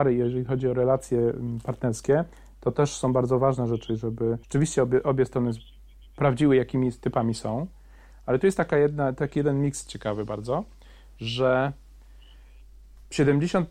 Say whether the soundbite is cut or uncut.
cut